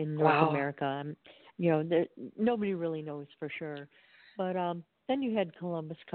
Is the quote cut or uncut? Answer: uncut